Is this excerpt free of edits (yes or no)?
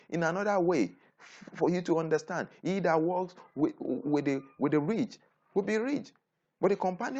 yes